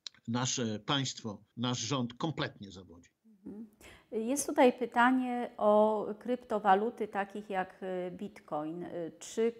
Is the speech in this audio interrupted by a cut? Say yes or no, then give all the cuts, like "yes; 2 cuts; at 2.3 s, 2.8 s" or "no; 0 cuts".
yes; 2 cuts; at 1.5 s, 3.2 s